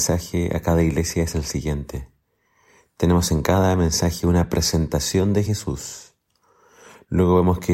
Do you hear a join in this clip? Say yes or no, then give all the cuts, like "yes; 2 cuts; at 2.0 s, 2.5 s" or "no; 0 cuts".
no; 0 cuts